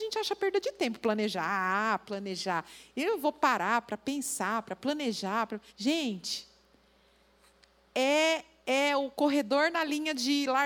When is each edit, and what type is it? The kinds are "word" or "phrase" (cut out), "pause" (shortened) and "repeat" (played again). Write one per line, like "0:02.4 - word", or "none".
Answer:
0:05.7 - pause